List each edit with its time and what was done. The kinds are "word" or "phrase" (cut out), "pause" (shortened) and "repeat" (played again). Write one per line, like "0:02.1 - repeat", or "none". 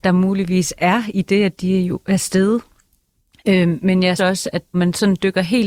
0:03.8 - word
0:04.2 - word
0:04.7 - word